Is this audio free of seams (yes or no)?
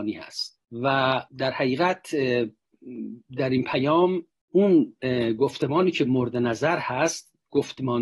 no